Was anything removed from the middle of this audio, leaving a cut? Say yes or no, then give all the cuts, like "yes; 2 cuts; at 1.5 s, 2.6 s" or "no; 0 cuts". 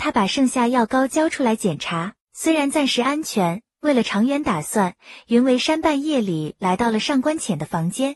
yes; 1 cut; at 2.2 s